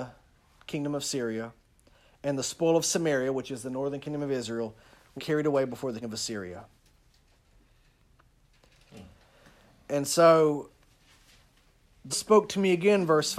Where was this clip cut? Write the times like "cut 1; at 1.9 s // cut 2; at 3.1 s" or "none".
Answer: cut 1; at 5.2 s // cut 2; at 6.0 s // cut 3; at 12.1 s

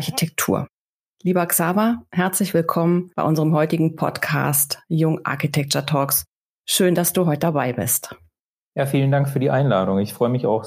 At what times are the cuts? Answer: none

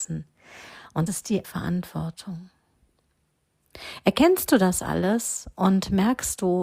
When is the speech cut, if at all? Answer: cut 1; at 1.1 s // cut 2; at 1.4 s

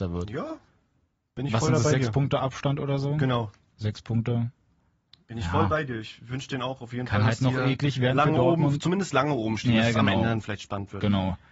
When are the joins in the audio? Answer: none

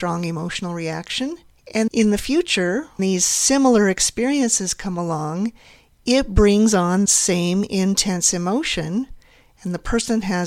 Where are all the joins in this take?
cut 1; at 1.9 s // cut 2; at 3.0 s // cut 3; at 7.1 s

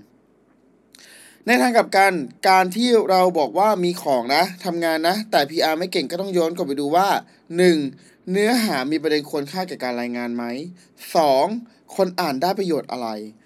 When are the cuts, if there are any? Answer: cut 1; at 2.4 s

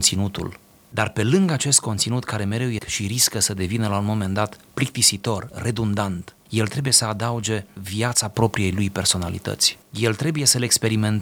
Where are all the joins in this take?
cut 1; at 2.8 s // cut 2; at 9.8 s

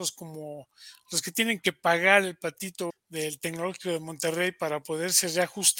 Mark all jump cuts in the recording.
cut 1; at 2.9 s

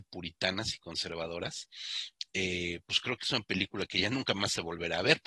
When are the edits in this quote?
none

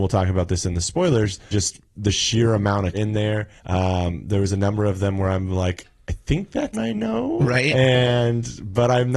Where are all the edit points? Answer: cut 1; at 1.5 s // cut 2; at 1.9 s // cut 3; at 2.9 s // cut 4; at 3.6 s // cut 5; at 6.7 s

